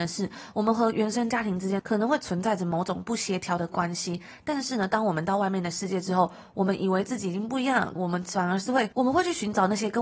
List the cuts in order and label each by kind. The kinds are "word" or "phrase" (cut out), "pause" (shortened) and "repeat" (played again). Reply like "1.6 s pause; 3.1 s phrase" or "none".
8.0 s phrase

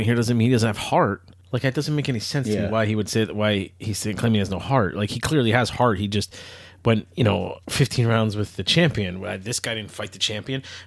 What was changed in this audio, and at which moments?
1.4 s pause; 7.6 s pause

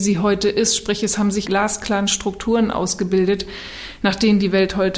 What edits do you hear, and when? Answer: 1.4 s phrase

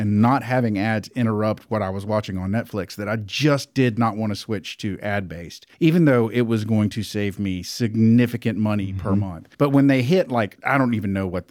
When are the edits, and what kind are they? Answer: 5.7 s pause; 9.5 s pause

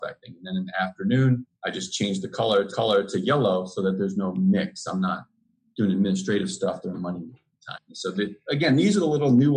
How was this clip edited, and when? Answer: 1.5 s pause; 2.7 s repeat; 6.9 s word

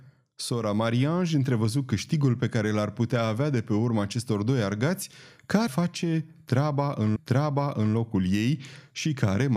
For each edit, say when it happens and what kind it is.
5.7 s word; 7.2 s repeat

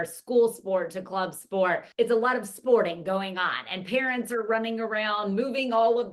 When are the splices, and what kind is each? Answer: 1.9 s pause

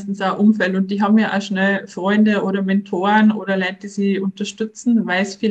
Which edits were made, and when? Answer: none

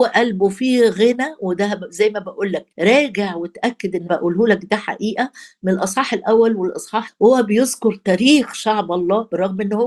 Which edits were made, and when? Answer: 2.7 s pause; 4.1 s word; 7.1 s word

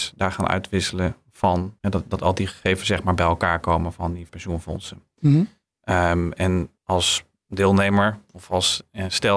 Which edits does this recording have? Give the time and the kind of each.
1.8 s pause; 4.3 s word; 6.8 s pause

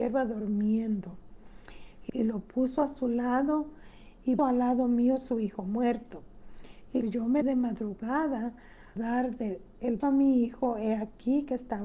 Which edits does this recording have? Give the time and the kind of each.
2.1 s word; 4.4 s word; 7.0 s word; 7.4 s word; 9.0 s word; 10.0 s word

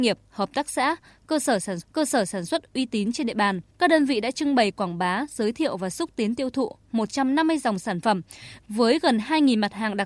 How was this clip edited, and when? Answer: 1.8 s repeat; 3.7 s pause

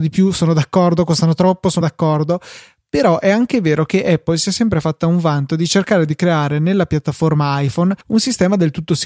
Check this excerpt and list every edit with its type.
1.8 s word; 8.0 s pause

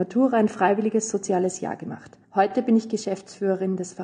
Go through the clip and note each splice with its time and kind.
2.2 s pause

